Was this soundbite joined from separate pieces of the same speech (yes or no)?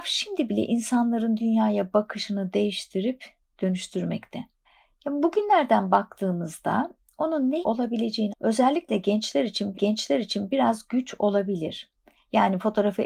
yes